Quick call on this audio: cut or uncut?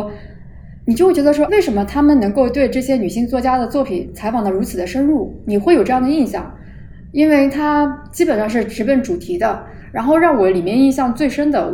cut